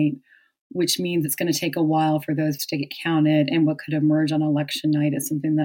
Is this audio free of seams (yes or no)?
no